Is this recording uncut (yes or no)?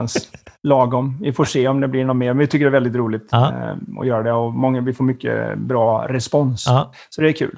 yes